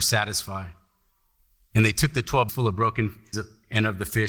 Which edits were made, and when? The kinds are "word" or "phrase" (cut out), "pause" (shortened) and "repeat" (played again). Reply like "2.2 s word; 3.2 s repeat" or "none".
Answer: 2.5 s word; 3.3 s word